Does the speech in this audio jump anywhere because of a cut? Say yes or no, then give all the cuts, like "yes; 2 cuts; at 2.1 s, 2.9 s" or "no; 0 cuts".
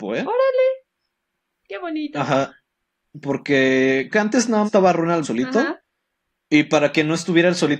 yes; 3 cuts; at 4.1 s, 4.7 s, 5.2 s